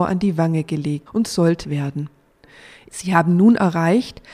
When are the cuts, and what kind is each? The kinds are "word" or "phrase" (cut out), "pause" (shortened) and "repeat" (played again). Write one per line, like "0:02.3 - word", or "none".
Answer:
0:01.1 - word
0:01.6 - word